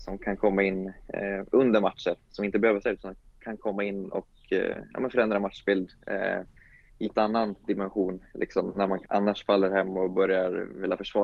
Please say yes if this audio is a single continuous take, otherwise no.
no